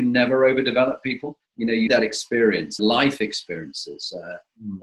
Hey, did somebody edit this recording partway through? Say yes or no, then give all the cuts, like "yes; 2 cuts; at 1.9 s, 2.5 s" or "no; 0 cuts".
yes; 3 cuts; at 1.5 s, 1.9 s, 2.8 s